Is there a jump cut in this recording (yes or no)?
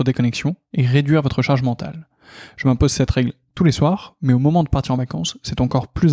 no